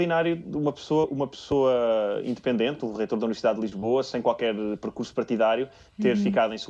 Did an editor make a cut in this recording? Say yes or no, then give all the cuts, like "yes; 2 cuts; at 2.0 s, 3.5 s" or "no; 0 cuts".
no; 0 cuts